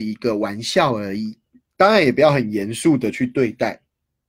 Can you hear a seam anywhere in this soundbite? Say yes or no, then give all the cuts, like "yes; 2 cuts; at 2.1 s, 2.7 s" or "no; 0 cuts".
no; 0 cuts